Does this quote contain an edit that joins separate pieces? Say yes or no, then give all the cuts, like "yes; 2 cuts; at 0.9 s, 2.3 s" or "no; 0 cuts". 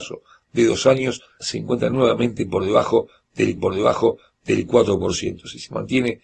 yes; 2 cuts; at 1.4 s, 3.6 s